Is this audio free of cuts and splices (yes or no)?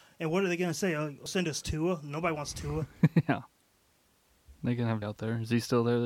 no